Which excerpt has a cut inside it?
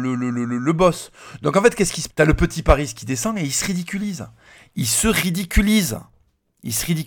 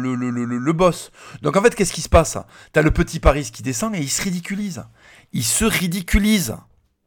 first; 1 cut; at 2.1 s

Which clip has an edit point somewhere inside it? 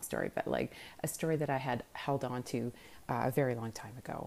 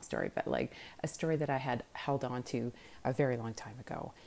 second; 1 cut; at 3.0 s

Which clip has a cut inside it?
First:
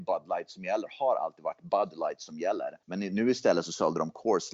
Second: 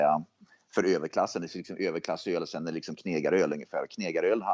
first; 1 cut; at 2.8 s

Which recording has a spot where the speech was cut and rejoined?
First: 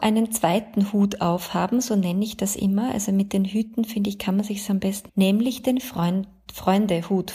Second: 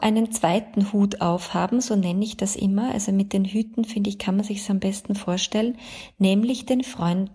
first; 1 cut; at 5.1 s

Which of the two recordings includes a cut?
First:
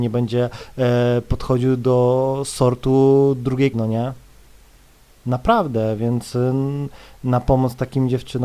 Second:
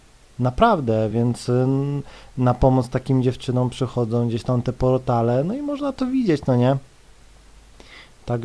first; 1 cut; at 3.7 s

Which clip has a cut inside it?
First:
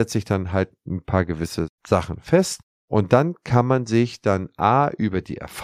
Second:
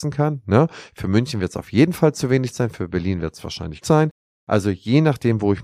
second; 1 cut; at 3.8 s

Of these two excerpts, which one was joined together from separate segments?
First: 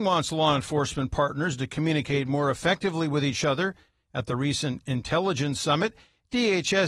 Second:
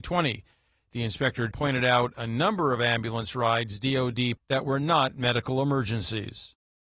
second; 2 cuts; at 1.5 s, 4.4 s

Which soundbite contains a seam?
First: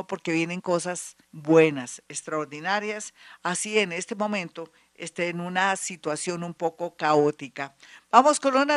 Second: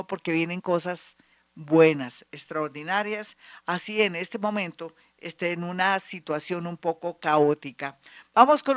first; 1 cut; at 1.2 s

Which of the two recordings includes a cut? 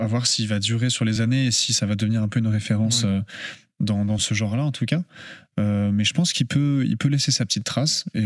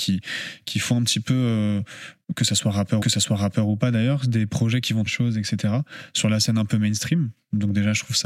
second; 2 cuts; at 3.0 s, 5.1 s

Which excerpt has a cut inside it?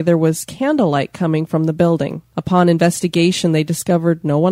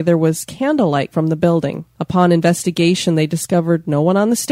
second; 1 cut; at 1.1 s

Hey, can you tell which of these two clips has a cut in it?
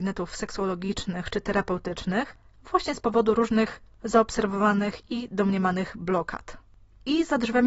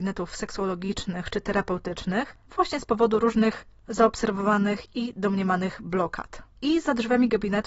second; 2 cuts; at 2.4 s, 6.5 s

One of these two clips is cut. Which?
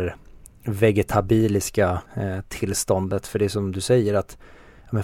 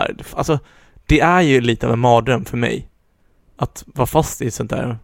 first; 1 cut; at 2.1 s

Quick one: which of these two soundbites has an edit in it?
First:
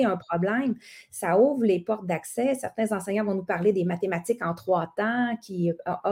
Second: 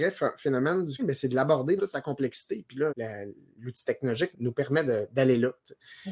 second; 4 cuts; at 1.0 s, 1.8 s, 2.9 s, 4.3 s

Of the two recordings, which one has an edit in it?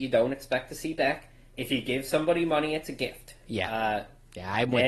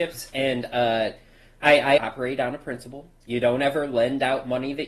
second; 1 cut; at 2.0 s

